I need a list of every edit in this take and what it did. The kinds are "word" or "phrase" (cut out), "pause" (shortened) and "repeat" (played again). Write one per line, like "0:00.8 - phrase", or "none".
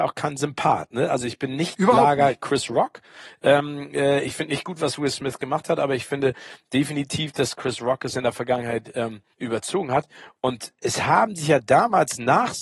0:09.3 - pause